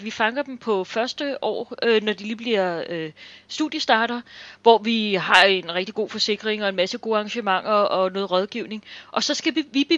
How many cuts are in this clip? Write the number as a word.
zero